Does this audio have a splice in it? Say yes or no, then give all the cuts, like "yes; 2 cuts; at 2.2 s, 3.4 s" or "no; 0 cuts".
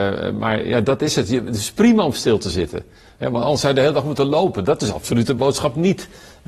no; 0 cuts